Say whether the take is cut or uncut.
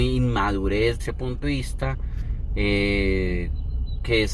cut